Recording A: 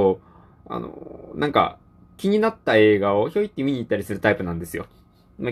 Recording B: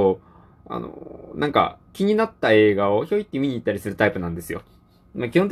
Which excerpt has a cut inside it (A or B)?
B